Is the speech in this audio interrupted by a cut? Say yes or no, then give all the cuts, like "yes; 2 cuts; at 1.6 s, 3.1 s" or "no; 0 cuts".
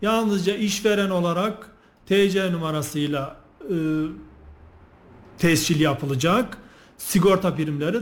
no; 0 cuts